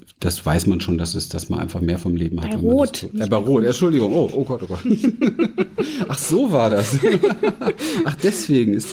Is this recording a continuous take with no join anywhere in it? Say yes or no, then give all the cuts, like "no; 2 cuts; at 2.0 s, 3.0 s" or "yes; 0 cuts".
yes; 0 cuts